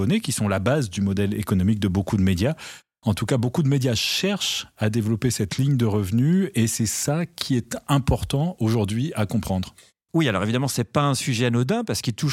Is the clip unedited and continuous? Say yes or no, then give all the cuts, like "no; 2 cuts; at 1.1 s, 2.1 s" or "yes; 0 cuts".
yes; 0 cuts